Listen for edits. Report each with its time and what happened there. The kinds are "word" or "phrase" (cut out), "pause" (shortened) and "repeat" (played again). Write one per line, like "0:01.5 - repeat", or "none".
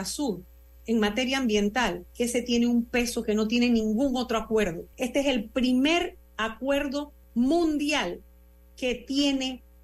0:04.9 - pause
0:07.2 - pause